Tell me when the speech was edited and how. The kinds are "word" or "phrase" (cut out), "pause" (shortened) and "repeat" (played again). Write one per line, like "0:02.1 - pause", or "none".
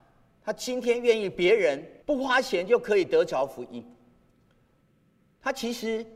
0:02.0 - pause

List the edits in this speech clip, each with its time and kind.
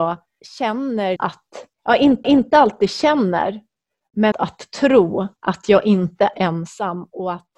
0:01.2 - word
0:01.7 - pause
0:02.2 - repeat
0:04.3 - phrase
0:05.4 - pause
0:06.3 - word

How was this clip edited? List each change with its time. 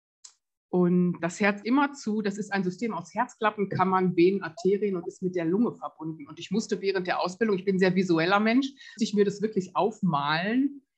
0:01.2 - word
0:01.6 - word
0:09.0 - word

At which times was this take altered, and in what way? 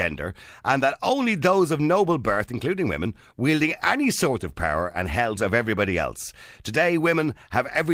0:05.4 - phrase

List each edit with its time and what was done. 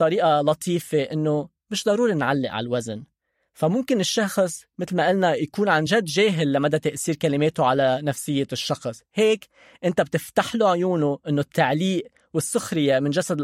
none

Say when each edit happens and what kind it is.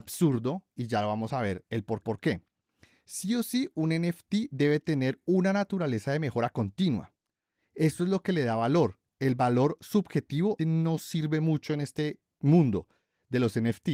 0:02.0 - repeat
0:10.6 - word

